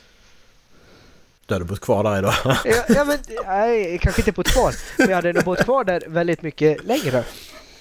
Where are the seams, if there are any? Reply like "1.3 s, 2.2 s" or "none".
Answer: none